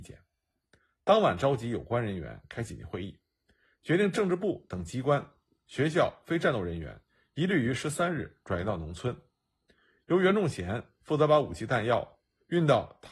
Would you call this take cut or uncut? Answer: uncut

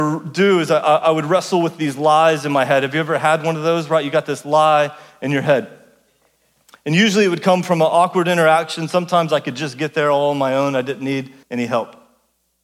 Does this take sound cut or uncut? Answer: cut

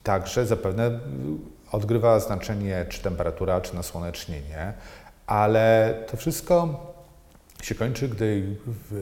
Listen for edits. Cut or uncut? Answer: uncut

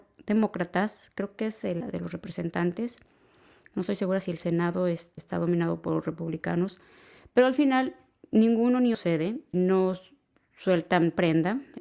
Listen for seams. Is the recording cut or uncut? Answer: cut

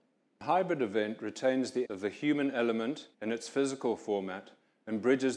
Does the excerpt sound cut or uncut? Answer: cut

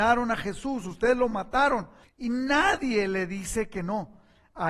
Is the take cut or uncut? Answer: cut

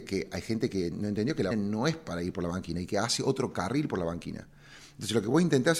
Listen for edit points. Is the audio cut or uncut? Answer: cut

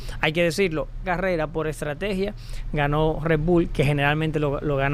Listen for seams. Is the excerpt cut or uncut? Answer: cut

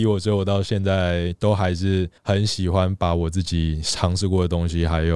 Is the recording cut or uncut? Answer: cut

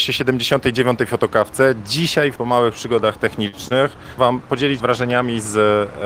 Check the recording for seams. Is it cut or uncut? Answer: cut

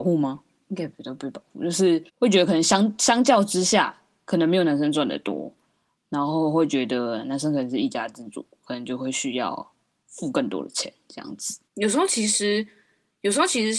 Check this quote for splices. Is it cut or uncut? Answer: cut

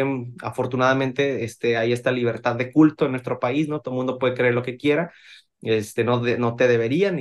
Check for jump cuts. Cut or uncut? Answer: uncut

